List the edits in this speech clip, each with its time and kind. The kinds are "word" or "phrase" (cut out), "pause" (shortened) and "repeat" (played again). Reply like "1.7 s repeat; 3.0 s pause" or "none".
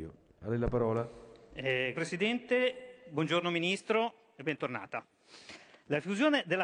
1.9 s word